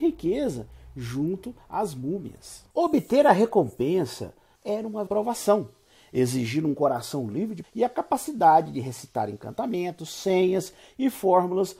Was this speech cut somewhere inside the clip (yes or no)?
yes